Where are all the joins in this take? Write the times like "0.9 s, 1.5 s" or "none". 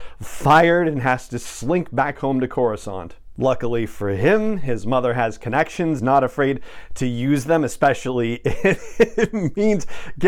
6.0 s